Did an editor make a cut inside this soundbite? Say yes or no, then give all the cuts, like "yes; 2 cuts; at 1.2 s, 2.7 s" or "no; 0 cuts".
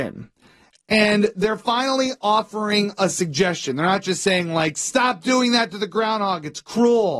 no; 0 cuts